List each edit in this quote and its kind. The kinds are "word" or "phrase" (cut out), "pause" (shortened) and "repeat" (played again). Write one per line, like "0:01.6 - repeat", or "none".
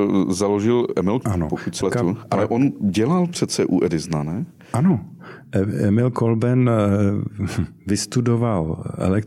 0:01.2 - word
0:01.8 - word